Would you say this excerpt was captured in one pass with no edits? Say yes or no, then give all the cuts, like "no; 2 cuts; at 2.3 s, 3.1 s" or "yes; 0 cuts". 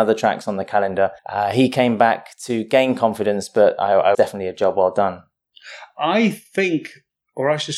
no; 2 cuts; at 1.2 s, 4.1 s